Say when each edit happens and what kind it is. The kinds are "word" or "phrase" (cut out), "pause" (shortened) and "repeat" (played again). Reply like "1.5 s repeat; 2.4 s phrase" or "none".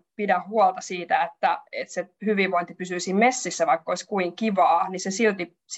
none